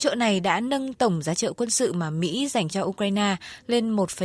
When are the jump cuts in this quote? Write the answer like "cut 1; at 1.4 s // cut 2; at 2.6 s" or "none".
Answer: cut 1; at 1.4 s